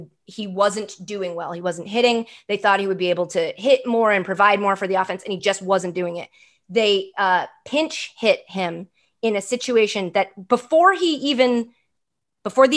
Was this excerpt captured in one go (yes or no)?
yes